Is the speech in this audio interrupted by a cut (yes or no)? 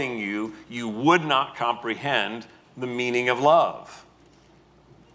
no